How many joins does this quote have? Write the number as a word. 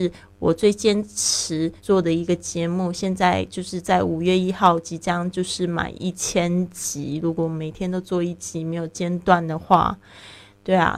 one